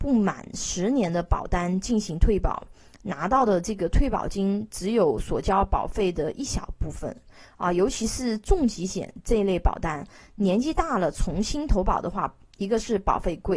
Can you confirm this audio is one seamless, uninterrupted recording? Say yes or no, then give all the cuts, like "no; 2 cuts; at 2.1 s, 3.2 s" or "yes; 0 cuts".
yes; 0 cuts